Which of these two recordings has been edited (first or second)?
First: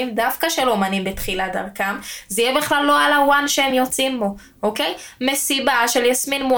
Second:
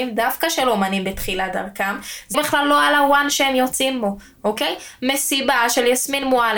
second